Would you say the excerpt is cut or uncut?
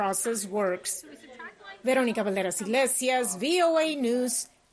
uncut